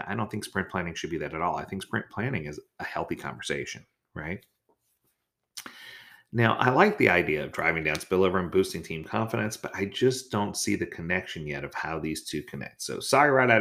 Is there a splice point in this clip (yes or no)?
no